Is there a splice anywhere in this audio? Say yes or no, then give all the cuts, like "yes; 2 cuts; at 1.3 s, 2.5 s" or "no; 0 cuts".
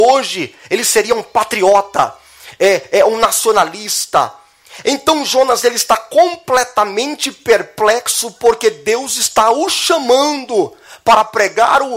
no; 0 cuts